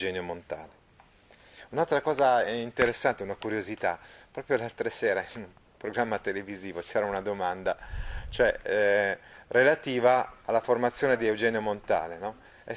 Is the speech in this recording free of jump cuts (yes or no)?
yes